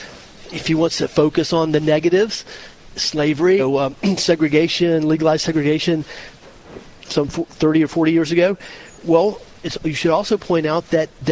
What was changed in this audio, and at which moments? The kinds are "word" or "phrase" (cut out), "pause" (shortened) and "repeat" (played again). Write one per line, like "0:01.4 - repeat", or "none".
0:03.6 - phrase

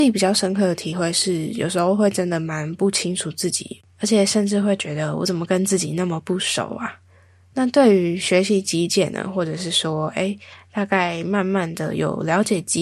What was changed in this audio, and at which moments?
none

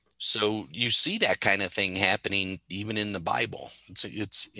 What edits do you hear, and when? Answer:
none

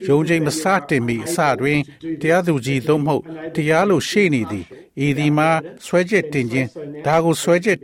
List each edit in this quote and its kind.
none

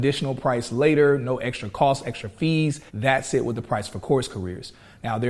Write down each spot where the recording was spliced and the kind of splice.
0:02.9 - pause

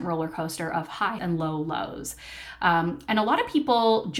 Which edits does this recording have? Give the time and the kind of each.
0:01.2 - word

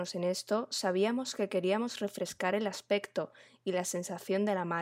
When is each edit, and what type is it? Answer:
none

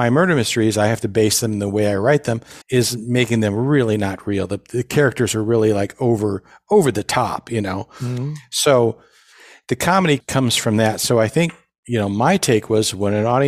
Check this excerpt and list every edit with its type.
0:02.6 - pause

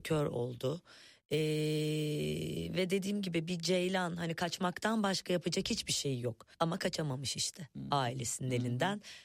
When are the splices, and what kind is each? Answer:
0:06.5 - pause

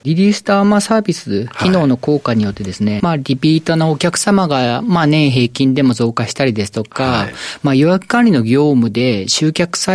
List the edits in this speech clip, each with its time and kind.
0:03.0 - phrase

